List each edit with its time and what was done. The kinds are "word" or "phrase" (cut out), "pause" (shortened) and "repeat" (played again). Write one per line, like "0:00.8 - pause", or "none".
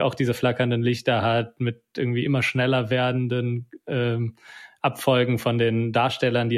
none